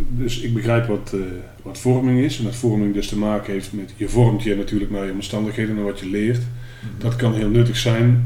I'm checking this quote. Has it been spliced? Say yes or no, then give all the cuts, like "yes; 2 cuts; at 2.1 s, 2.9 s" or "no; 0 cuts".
no; 0 cuts